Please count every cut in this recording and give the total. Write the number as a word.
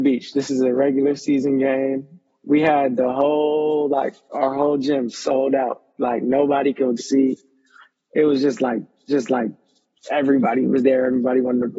two